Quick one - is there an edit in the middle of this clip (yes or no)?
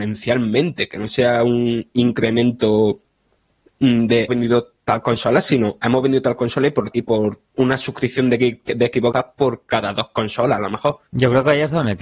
yes